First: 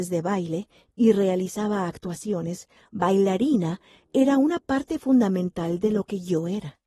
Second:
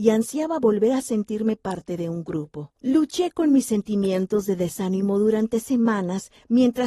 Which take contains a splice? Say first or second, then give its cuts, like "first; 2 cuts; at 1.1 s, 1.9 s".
second; 1 cut; at 2.8 s